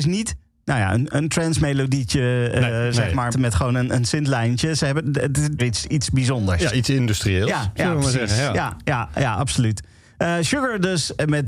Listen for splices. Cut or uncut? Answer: cut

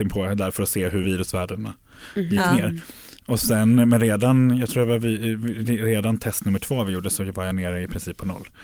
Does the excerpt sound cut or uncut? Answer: uncut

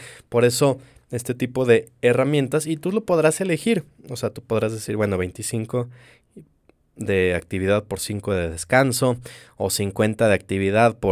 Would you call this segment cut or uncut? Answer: uncut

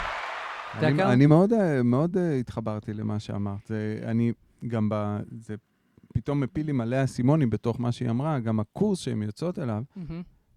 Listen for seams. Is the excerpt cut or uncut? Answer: uncut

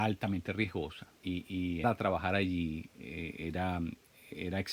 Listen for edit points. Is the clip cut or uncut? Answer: cut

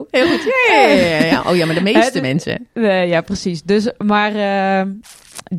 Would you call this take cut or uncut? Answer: uncut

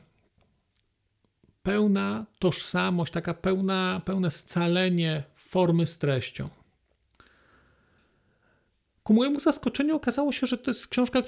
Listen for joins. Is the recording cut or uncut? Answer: uncut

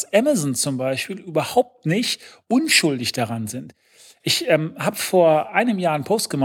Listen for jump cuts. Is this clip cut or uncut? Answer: uncut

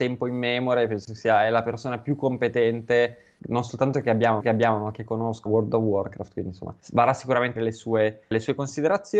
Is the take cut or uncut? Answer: cut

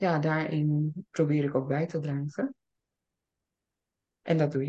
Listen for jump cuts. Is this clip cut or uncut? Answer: cut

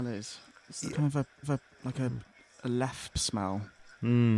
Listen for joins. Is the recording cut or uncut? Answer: cut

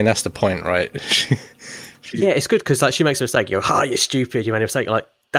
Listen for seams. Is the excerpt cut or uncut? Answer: uncut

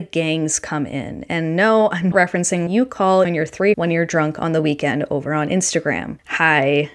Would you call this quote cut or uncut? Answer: cut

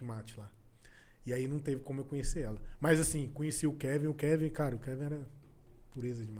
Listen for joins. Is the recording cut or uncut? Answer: uncut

